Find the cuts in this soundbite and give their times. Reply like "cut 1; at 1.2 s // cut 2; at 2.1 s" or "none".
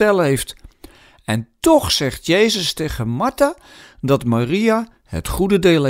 none

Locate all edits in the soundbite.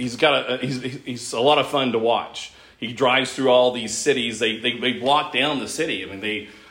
none

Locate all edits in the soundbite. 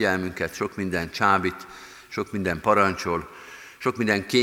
none

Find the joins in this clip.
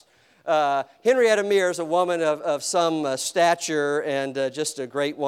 none

